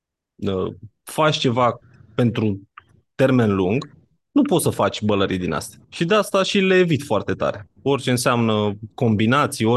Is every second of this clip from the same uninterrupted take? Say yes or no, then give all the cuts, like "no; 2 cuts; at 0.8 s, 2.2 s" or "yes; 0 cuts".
no; 1 cut; at 5.8 s